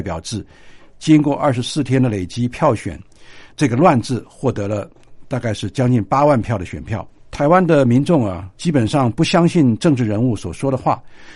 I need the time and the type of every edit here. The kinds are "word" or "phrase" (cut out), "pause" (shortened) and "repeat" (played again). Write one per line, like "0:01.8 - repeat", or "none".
0:08.5 - pause